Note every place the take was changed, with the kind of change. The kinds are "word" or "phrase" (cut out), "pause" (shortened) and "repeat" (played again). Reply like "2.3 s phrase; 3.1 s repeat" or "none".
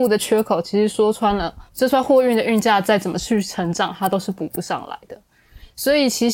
1.7 s pause